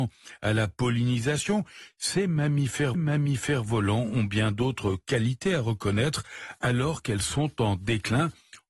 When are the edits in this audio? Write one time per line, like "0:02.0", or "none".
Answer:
0:02.9